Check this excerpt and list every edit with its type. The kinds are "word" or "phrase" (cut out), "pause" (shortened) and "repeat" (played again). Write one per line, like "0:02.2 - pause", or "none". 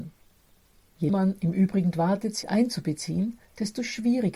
0:01.1 - word
0:01.9 - word
0:02.4 - word

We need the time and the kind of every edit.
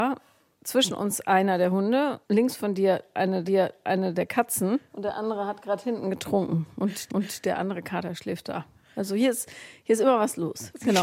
0:02.2 - pause
0:03.4 - repeat
0:04.9 - pause
0:07.1 - repeat

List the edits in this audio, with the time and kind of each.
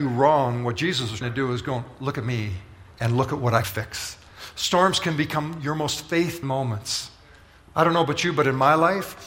0:01.2 - word
0:02.9 - pause
0:03.6 - word
0:06.4 - word

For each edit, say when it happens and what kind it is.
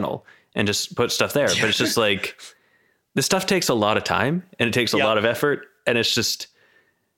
none

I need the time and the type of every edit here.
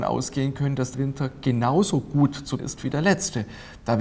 0:00.9 - word
0:02.6 - word

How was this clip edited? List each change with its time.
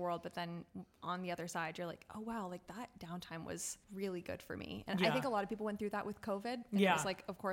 0:03.8 - pause

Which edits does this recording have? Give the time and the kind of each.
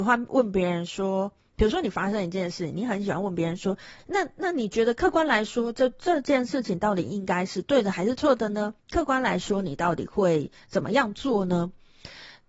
0:04.0 - word
0:08.8 - pause

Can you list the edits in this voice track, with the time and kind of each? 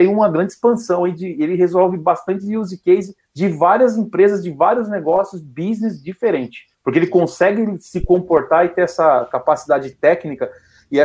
0:03.2 - pause
0:06.7 - pause

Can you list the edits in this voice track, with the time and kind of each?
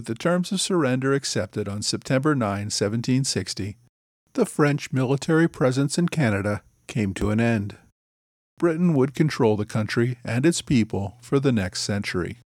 none

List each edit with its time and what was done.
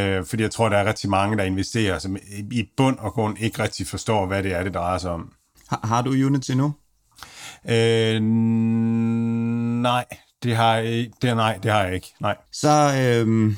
0:05.5 - pause
0:12.5 - pause

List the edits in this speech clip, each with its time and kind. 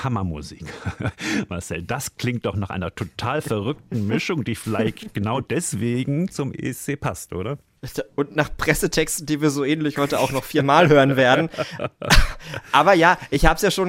none

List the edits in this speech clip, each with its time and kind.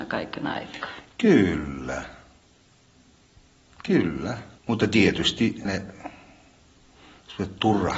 0:04.6 - pause
0:05.7 - word

